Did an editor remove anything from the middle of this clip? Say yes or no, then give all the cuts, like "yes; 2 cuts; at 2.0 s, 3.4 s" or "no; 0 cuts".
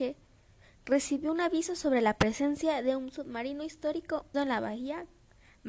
yes; 1 cut; at 4.3 s